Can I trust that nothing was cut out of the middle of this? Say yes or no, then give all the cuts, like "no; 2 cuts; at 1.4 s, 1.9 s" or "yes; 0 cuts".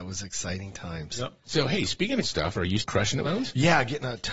no; 4 cuts; at 1.4 s, 2.2 s, 2.8 s, 3.2 s